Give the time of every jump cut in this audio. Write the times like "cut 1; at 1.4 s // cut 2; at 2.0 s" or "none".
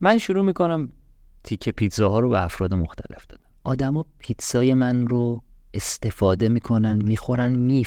none